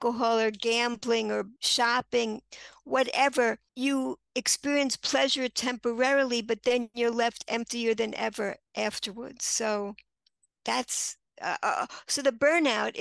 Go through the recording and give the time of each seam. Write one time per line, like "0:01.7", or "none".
0:01.6
0:03.7
0:10.6